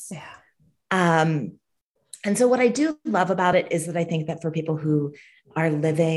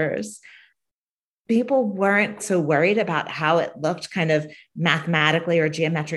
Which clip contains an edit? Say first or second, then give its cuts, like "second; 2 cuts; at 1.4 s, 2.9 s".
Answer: second; 1 cut; at 2.4 s